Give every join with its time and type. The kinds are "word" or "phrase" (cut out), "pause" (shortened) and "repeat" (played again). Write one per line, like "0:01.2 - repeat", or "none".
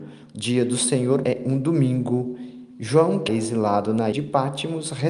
0:01.2 - word
0:03.3 - word
0:04.1 - word